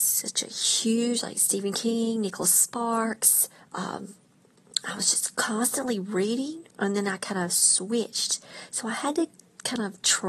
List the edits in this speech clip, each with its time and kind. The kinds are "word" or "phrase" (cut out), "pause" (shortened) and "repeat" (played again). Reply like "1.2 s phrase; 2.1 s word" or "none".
3.6 s pause; 6.7 s pause